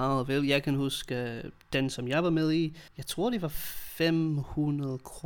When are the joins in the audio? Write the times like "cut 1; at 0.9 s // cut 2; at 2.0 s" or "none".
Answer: cut 1; at 2.9 s